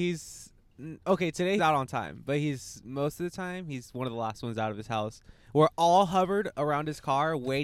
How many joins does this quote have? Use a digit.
1